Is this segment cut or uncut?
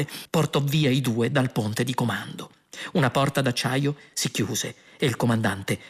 uncut